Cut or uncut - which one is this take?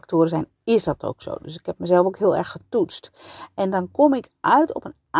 uncut